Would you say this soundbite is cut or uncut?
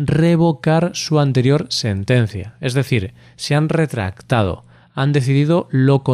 uncut